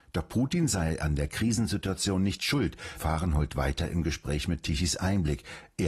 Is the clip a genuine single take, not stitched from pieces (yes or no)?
no